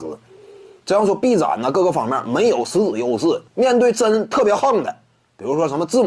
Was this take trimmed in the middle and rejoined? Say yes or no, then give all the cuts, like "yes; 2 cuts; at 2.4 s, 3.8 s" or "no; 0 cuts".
yes; 1 cut; at 3.5 s